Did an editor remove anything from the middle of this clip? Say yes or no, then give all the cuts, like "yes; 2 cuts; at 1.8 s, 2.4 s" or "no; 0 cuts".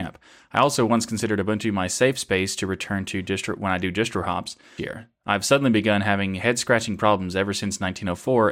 yes; 1 cut; at 4.8 s